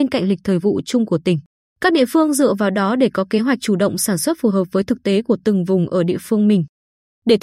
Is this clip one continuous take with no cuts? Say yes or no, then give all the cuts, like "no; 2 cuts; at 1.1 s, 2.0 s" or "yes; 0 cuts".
yes; 0 cuts